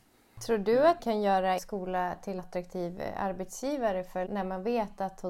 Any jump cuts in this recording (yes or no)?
yes